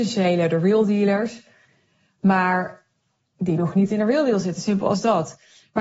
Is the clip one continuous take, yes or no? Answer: yes